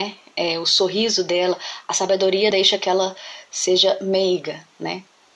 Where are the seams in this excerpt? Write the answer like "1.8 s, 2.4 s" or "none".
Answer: 2.5 s